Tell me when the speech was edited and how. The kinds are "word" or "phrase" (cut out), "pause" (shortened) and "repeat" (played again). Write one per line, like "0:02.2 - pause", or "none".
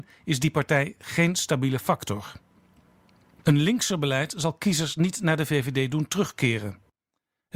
none